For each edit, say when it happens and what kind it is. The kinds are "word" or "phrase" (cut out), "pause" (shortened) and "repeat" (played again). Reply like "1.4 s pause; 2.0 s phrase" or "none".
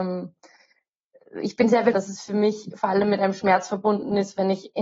1.9 s word